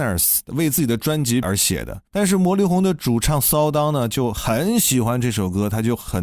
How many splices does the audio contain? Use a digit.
2